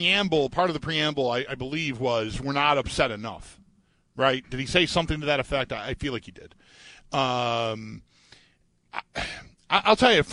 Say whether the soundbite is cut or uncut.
uncut